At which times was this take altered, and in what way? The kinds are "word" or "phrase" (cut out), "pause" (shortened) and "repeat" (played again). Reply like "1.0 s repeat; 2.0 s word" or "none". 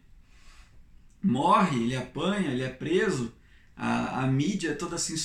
none